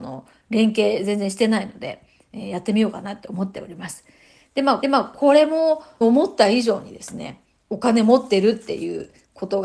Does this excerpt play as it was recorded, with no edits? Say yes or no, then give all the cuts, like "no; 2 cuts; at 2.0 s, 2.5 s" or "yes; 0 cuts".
no; 3 cuts; at 4.8 s, 6.0 s, 7.6 s